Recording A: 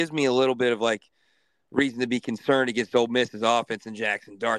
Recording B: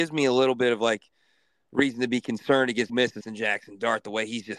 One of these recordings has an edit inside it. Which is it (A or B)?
B